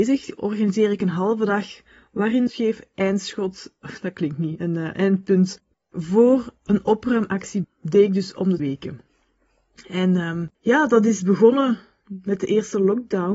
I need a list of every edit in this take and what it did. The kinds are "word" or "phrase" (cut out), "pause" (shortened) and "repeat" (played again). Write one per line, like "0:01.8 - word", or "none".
0:02.5 - phrase
0:07.6 - phrase
0:08.6 - word
0:10.5 - pause